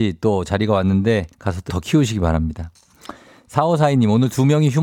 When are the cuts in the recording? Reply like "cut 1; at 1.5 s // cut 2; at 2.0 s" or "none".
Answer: cut 1; at 1.3 s // cut 2; at 1.7 s